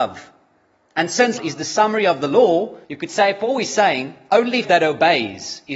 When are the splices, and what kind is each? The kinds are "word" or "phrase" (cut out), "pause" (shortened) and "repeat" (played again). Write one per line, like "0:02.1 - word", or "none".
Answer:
0:01.4 - word
0:02.8 - pause
0:04.6 - word